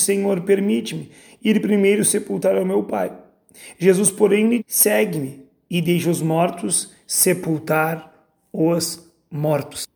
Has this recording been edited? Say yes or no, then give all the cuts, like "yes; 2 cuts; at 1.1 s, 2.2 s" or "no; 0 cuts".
yes; 1 cut; at 4.6 s